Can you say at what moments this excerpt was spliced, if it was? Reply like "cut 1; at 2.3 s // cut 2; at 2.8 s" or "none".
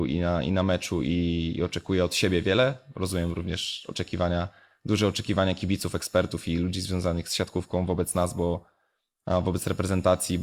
none